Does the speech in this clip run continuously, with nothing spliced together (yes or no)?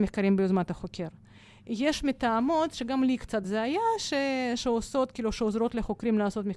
yes